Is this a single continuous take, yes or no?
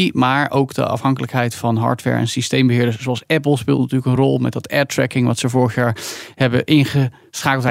yes